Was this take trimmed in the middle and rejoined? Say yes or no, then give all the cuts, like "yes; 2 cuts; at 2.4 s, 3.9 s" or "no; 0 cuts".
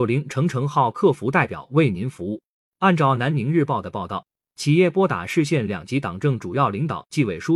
no; 0 cuts